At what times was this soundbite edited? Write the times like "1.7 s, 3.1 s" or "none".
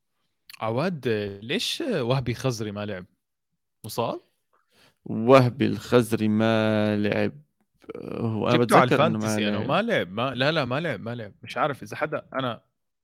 none